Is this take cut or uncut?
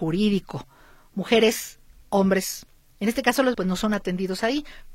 cut